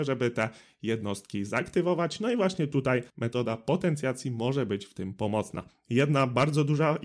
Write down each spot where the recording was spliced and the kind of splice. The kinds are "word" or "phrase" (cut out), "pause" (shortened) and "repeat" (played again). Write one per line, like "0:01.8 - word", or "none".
0:03.1 - pause